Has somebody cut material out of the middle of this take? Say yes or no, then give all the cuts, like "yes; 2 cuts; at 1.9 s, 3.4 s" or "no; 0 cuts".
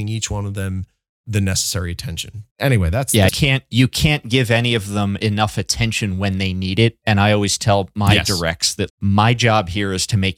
yes; 3 cuts; at 2.5 s, 3.3 s, 8.9 s